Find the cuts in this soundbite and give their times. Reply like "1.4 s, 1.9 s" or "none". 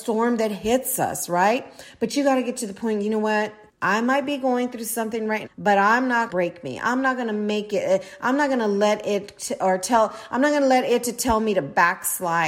3.7 s, 5.5 s, 6.3 s